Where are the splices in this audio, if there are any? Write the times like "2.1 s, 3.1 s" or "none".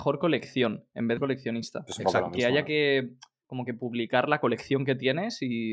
1.2 s